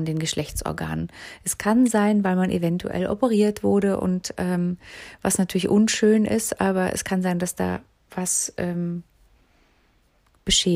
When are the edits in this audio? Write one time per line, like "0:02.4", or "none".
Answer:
none